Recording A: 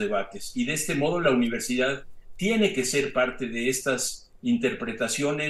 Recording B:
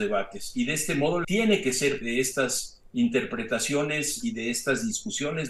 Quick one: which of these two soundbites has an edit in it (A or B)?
B